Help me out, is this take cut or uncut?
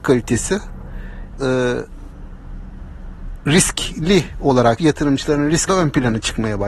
cut